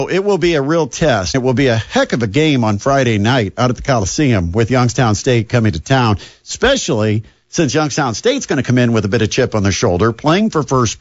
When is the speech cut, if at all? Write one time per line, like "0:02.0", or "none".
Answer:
0:01.3